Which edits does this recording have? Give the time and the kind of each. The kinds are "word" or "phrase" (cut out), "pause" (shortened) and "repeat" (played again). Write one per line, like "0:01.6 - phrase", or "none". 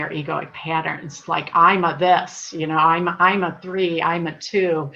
none